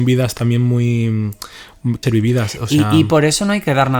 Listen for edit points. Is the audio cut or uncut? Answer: cut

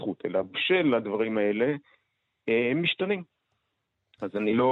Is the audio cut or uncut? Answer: uncut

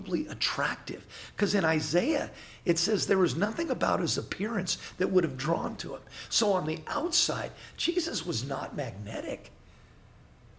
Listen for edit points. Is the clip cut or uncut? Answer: cut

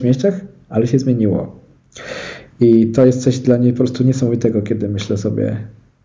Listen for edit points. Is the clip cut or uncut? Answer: uncut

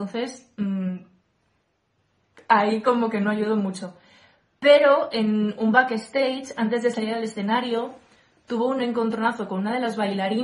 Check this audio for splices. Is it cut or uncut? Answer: uncut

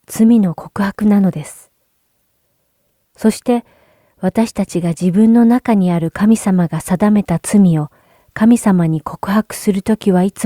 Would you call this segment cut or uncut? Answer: uncut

